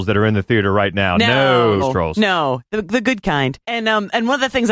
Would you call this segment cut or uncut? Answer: cut